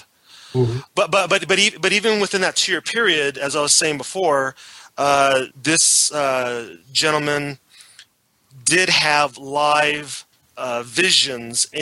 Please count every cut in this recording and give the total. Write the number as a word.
two